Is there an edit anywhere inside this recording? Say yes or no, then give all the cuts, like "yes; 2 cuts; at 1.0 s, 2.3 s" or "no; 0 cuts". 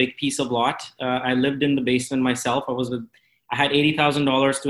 no; 0 cuts